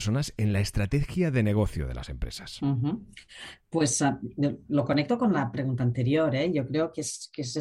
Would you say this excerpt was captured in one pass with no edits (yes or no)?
yes